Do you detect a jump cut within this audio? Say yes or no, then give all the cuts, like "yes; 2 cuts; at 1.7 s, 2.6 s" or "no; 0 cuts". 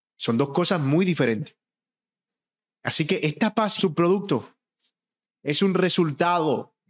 yes; 2 cuts; at 2.3 s, 3.8 s